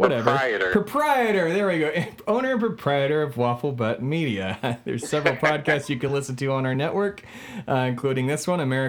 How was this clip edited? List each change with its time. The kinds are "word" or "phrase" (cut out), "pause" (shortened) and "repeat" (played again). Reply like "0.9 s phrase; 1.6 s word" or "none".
none